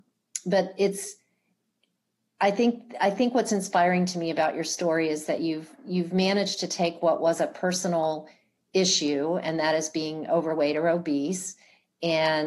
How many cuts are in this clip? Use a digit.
0